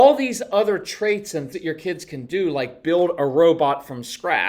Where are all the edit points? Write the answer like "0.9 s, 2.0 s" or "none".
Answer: 1.5 s